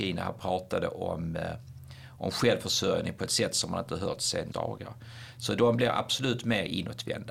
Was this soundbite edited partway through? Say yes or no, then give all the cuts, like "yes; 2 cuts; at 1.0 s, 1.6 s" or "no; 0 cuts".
yes; 1 cut; at 4.5 s